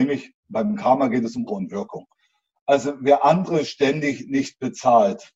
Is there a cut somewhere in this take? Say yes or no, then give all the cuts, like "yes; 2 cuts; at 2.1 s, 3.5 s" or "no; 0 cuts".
yes; 1 cut; at 1.5 s